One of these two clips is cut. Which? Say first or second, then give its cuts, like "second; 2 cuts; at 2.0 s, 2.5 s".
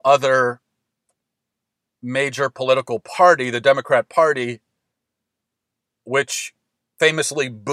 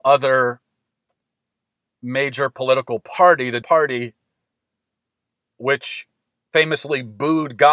second; 1 cut; at 3.6 s